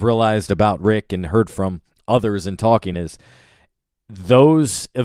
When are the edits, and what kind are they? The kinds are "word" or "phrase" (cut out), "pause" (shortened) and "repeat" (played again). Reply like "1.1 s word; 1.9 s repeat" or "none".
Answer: none